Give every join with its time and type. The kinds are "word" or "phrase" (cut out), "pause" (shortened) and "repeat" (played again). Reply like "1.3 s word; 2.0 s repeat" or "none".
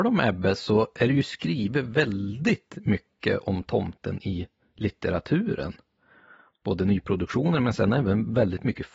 none